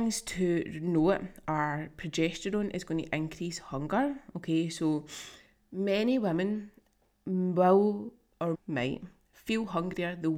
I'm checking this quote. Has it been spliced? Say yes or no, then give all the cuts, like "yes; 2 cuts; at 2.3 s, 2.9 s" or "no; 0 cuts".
yes; 1 cut; at 8.5 s